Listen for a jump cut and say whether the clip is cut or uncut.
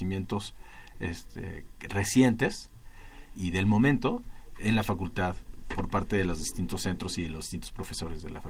cut